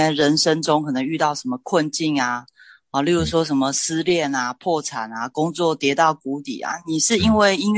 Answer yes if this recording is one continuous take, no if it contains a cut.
yes